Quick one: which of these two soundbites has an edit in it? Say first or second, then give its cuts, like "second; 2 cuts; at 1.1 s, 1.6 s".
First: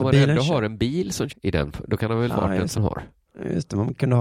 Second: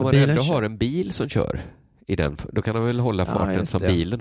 first; 3 cuts; at 1.3 s, 2.3 s, 2.7 s